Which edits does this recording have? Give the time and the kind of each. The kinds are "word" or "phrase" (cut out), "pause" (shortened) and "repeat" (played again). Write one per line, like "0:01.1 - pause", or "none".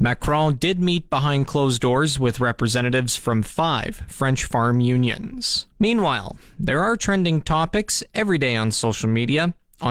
0:05.7 - pause